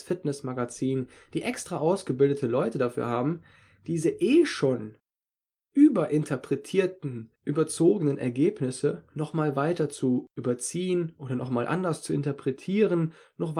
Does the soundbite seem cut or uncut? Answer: uncut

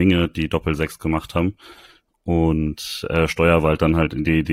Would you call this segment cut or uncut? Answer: uncut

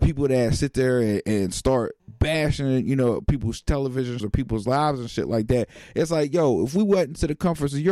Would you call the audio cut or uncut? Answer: cut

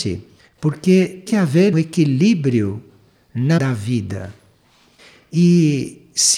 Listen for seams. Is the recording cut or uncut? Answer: cut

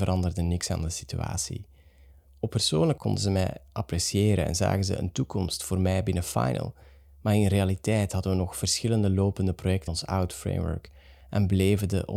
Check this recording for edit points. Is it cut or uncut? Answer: cut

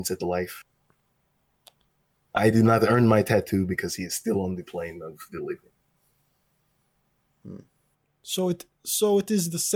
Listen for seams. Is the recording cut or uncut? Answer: uncut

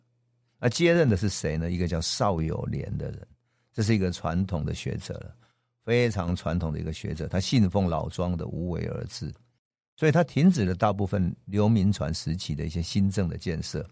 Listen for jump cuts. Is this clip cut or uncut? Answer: uncut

